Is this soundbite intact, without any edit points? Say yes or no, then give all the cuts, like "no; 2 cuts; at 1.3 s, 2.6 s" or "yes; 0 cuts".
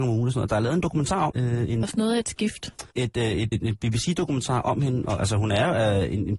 no; 4 cuts; at 1.3 s, 1.8 s, 2.9 s, 3.5 s